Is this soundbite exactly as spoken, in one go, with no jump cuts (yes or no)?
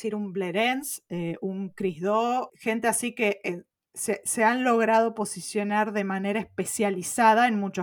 yes